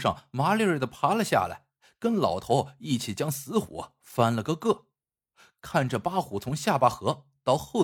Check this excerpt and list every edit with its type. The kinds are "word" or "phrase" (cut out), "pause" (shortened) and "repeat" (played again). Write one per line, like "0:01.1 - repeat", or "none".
none